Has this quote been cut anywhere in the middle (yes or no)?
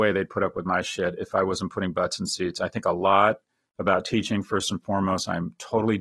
no